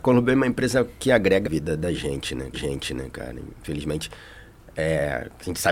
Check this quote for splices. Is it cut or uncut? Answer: cut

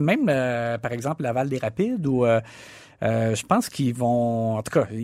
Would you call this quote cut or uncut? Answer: uncut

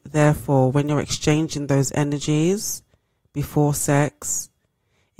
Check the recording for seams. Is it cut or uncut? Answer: uncut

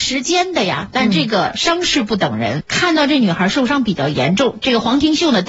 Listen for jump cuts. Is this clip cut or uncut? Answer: cut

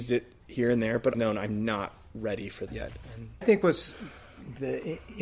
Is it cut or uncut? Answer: cut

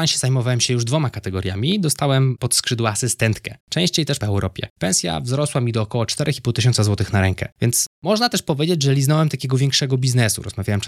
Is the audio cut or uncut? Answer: cut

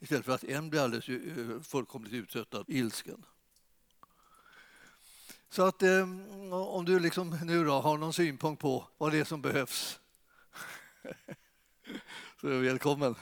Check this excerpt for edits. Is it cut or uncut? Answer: cut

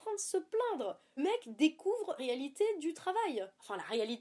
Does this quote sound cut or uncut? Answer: cut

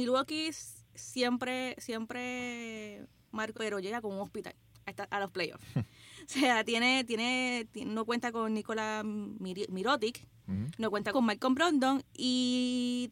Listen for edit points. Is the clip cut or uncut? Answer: cut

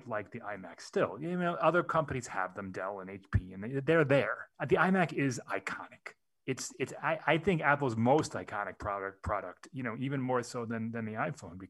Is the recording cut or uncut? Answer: cut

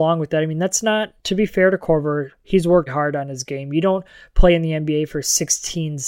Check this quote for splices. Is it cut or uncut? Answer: cut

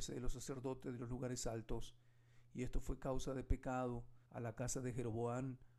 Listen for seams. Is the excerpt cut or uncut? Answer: cut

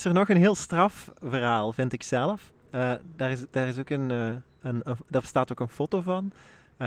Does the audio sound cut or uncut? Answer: uncut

